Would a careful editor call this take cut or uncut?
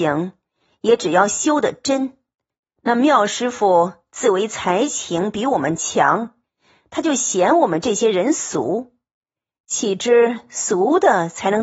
uncut